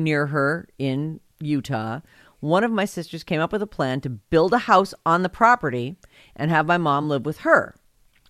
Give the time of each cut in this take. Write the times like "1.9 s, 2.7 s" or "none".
none